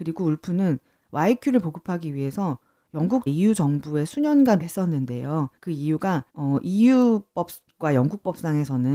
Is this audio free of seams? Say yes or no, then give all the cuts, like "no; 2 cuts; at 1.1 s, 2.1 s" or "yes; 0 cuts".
no; 4 cuts; at 3.3 s, 4.6 s, 5.6 s, 6.3 s